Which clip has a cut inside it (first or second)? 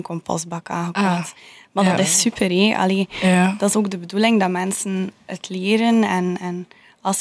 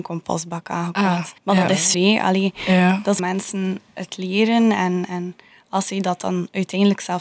second